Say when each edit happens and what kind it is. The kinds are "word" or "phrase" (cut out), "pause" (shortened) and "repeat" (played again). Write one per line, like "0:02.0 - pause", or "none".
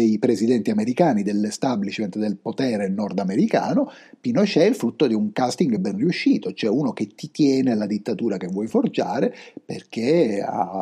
none

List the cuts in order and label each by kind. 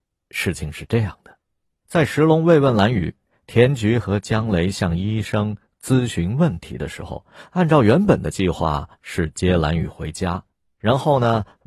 0:01.6 - pause

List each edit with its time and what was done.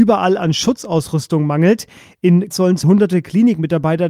0:02.5 - word
0:02.8 - word

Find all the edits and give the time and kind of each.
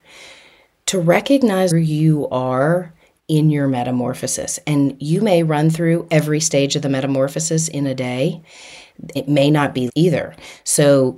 0:01.7 - word
0:09.2 - word
0:09.9 - word

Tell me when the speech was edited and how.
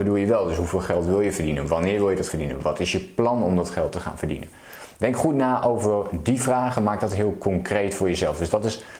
0:02.3 - word

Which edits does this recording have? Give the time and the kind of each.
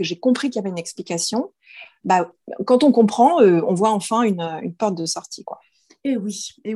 none

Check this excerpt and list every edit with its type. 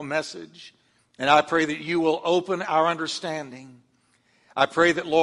0:01.0 - pause

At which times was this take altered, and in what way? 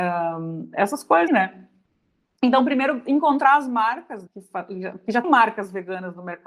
0:01.3 - word
0:04.3 - word
0:05.2 - word

